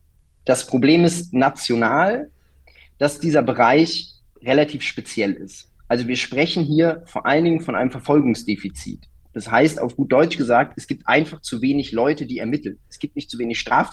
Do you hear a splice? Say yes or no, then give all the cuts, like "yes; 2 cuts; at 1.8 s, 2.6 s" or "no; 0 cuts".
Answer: no; 0 cuts